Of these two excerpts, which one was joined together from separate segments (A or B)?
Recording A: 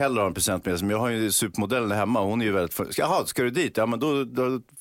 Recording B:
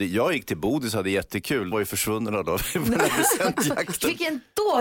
B